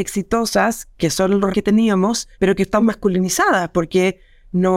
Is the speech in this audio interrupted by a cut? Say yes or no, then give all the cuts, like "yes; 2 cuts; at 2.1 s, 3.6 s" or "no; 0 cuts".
yes; 4 cuts; at 0.9 s, 1.5 s, 2.3 s, 2.8 s